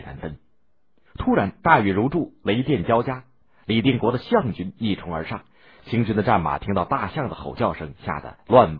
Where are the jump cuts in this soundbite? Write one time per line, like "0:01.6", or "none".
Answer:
none